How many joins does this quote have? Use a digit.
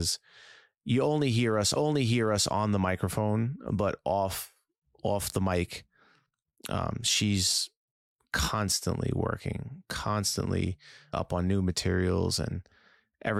2